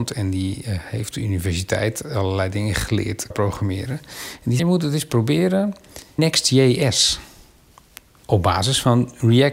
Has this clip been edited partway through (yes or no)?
yes